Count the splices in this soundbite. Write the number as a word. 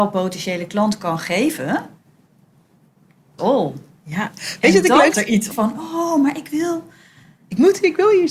three